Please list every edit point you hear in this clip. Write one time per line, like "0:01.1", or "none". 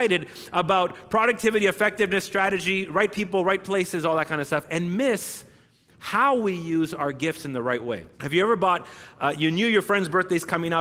0:08.1